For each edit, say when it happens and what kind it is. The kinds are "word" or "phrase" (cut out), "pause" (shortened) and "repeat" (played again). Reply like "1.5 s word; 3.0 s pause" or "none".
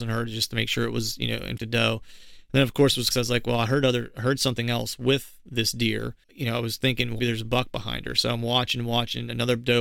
1.6 s word; 3.1 s phrase; 6.2 s word; 7.2 s word